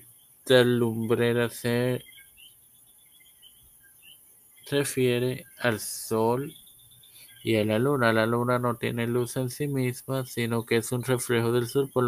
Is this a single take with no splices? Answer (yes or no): yes